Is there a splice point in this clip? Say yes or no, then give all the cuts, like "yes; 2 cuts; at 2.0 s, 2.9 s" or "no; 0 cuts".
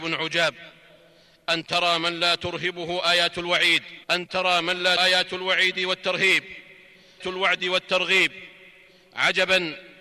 yes; 3 cuts; at 4.0 s, 5.0 s, 7.2 s